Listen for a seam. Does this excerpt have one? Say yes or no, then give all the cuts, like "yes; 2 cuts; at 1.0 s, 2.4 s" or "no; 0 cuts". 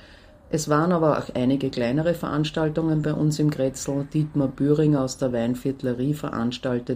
no; 0 cuts